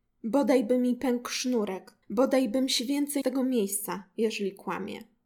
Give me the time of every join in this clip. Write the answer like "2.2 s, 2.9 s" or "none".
2.0 s, 3.2 s